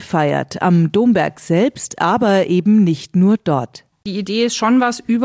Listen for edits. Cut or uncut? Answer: uncut